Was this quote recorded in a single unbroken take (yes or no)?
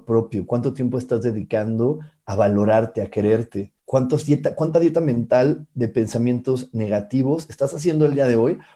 no